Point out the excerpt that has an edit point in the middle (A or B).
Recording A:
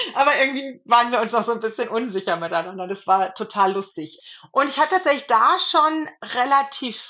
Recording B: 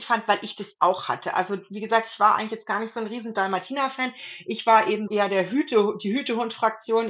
B